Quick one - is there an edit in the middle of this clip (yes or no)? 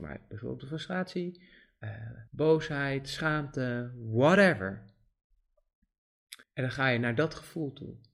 yes